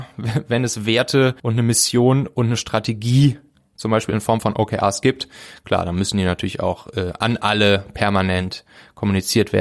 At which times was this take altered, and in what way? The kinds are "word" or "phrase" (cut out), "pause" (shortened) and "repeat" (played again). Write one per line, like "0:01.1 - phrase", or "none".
0:01.4 - pause